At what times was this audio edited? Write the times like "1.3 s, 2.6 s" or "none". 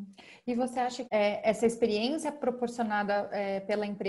1.0 s